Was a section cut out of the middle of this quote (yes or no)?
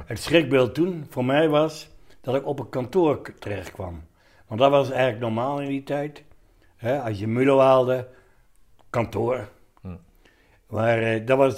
no